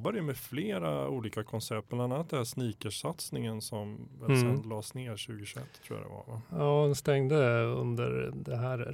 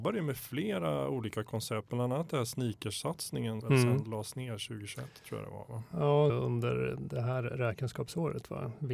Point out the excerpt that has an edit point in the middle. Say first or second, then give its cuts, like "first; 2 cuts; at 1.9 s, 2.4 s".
second; 2 cuts; at 3.6 s, 6.3 s